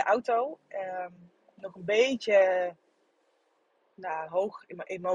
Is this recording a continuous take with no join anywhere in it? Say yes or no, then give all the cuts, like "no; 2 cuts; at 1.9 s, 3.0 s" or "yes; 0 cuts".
yes; 0 cuts